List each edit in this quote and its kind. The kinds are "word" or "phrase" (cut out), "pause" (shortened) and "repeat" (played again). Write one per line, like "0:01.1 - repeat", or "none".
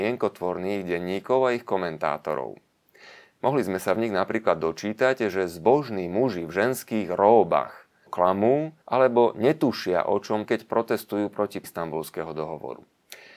0:08.1 - word
0:08.8 - pause
0:10.5 - word
0:11.6 - word